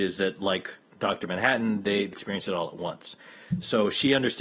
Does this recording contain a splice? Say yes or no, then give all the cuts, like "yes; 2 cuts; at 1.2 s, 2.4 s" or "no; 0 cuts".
yes; 1 cut; at 2.1 s